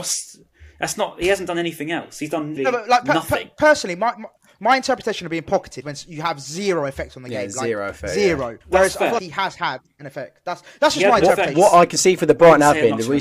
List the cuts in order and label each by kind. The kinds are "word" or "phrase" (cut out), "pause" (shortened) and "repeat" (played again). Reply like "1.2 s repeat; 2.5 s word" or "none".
2.6 s word; 5.8 s word; 8.6 s pause; 9.2 s word